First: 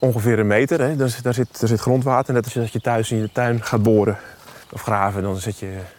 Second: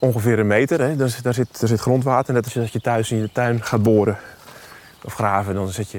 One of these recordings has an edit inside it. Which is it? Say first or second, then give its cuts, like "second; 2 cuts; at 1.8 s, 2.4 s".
first; 1 cut; at 4.6 s